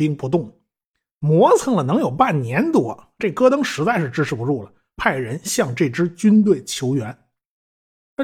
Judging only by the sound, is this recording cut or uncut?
uncut